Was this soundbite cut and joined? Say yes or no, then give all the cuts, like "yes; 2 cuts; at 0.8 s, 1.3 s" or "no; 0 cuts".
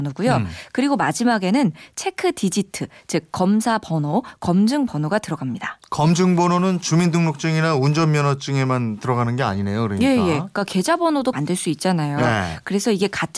yes; 1 cut; at 11.3 s